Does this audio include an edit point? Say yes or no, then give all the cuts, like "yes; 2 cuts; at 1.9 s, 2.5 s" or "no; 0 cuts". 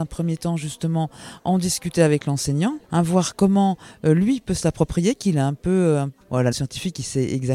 yes; 3 cuts; at 2.8 s, 6.2 s, 6.5 s